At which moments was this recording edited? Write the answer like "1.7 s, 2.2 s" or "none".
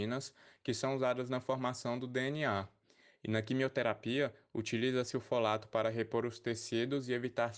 none